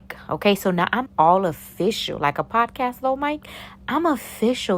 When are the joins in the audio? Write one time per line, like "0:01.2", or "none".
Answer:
0:01.1